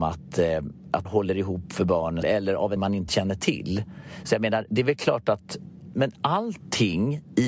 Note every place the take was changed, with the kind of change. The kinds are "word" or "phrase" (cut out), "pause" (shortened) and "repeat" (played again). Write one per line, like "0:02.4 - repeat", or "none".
0:01.0 - word
0:02.2 - word
0:02.8 - word
0:03.1 - word
0:04.7 - word
0:05.9 - word